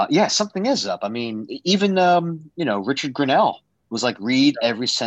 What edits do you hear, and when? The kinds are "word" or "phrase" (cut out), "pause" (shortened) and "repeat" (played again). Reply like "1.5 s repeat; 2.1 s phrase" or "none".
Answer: none

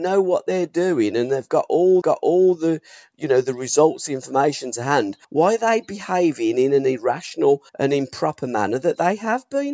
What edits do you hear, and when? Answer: 2.0 s repeat; 5.2 s pause; 7.7 s pause

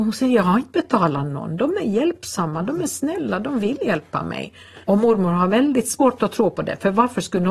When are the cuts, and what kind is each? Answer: 4.8 s pause

